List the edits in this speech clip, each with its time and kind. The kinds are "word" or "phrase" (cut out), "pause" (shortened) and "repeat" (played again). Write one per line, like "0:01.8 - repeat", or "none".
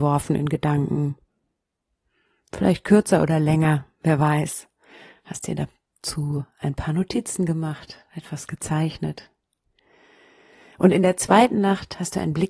none